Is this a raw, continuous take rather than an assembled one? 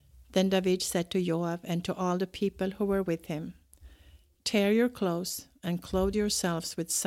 yes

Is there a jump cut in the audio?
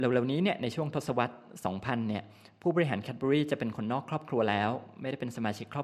no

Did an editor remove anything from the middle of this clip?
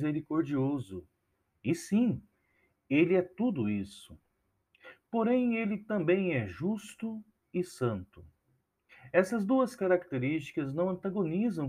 no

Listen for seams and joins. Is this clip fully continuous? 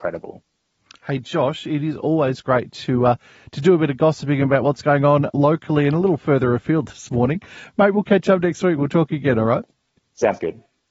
yes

